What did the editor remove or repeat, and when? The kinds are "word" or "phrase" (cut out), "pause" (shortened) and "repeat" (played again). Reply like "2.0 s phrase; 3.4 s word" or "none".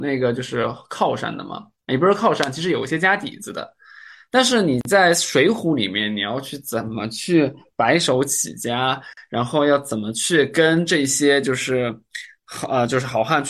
none